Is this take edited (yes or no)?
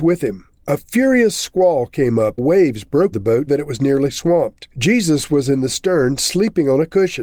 yes